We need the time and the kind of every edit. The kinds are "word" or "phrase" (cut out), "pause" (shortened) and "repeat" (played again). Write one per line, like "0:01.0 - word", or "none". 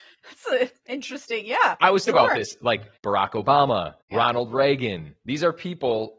0:02.1 - word
0:03.0 - pause
0:04.0 - pause